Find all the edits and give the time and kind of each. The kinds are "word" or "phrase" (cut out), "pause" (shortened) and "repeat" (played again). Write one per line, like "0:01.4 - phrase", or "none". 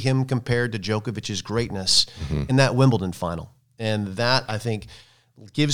none